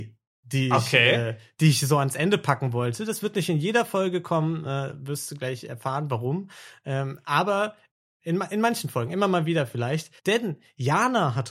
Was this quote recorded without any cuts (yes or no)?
no